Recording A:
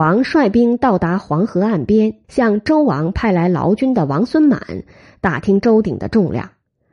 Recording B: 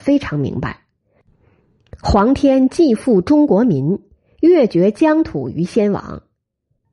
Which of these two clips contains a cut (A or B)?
A